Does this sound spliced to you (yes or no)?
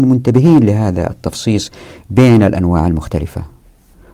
no